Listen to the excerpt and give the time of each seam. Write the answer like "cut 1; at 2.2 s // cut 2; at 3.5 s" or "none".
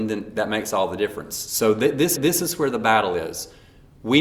cut 1; at 2.2 s